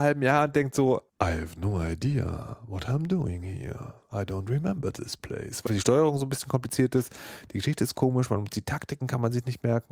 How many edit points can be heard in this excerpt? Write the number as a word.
two